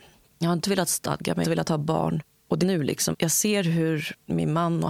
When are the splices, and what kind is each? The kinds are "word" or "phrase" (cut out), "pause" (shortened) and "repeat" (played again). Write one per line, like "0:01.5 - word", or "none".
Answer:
0:01.4 - word
0:02.6 - word
0:03.1 - word